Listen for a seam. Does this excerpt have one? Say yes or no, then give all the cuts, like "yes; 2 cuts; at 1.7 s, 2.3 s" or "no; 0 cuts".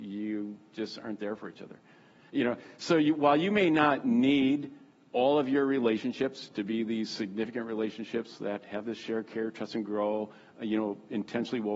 no; 0 cuts